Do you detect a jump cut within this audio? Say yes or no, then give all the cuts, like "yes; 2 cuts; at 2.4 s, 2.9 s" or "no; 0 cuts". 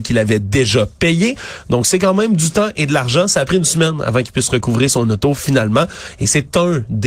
no; 0 cuts